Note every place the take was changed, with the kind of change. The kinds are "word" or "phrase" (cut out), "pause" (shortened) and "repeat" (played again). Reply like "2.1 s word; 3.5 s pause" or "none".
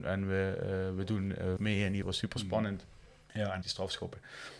1.6 s word; 2.0 s word; 3.6 s word